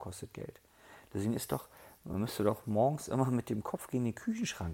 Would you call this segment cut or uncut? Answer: uncut